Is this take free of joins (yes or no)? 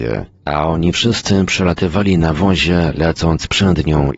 yes